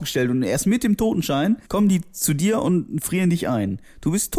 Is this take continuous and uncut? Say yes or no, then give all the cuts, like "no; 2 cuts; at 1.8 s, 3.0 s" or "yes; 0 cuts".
no; 1 cut; at 1.6 s